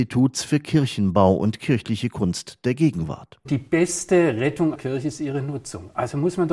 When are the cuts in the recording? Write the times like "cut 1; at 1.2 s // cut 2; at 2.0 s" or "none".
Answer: cut 1; at 4.7 s